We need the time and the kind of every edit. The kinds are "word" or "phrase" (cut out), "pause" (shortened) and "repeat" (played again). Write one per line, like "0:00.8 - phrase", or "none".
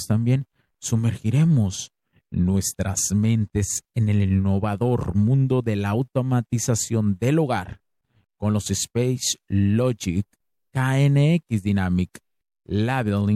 none